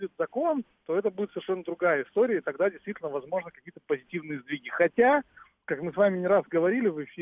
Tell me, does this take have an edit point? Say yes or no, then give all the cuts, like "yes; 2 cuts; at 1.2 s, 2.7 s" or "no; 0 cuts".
no; 0 cuts